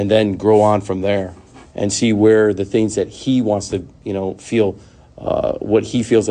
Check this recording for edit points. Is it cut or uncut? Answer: uncut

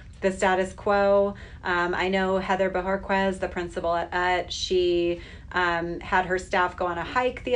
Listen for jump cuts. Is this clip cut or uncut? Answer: uncut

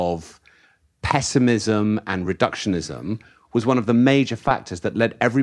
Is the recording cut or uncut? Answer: uncut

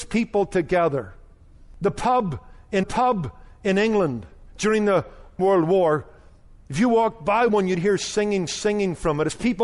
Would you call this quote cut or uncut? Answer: cut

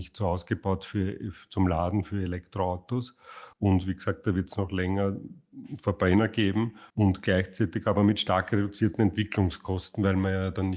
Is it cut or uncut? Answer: cut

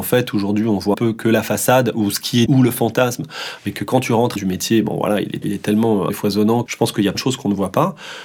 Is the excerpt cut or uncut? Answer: cut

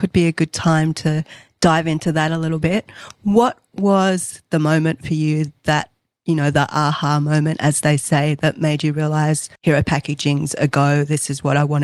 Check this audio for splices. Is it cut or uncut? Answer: cut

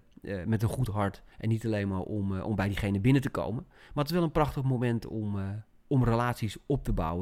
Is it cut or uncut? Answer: cut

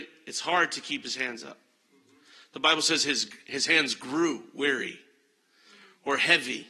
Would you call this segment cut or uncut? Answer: uncut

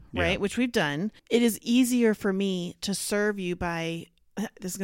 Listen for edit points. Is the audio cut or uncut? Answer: cut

